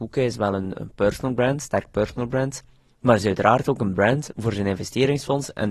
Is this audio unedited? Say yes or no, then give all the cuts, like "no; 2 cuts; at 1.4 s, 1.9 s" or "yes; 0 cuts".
yes; 0 cuts